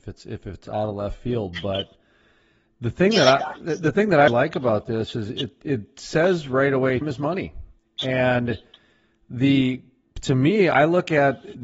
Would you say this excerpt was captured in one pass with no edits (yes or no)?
no